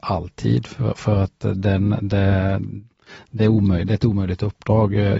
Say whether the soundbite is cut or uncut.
uncut